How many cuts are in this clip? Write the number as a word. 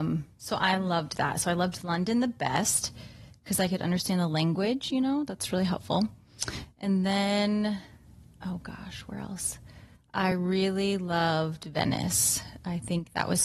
zero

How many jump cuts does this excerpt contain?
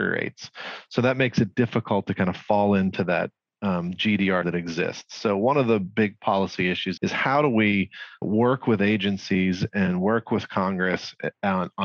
three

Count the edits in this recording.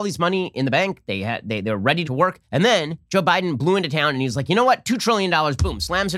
two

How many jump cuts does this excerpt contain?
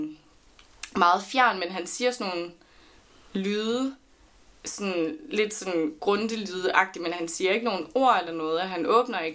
zero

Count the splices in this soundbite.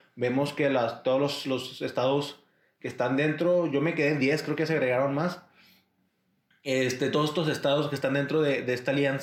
zero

